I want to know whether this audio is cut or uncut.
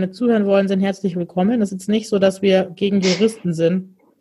cut